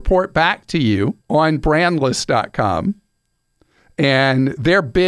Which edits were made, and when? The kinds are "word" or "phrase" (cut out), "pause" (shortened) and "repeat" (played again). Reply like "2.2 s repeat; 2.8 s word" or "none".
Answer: 1.2 s pause